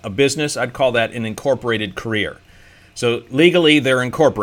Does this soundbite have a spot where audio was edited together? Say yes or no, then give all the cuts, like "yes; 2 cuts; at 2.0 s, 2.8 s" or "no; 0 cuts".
no; 0 cuts